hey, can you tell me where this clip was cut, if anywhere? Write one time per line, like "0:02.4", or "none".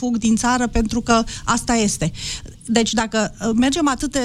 none